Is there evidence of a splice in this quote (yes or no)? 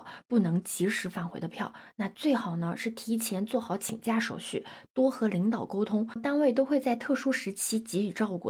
yes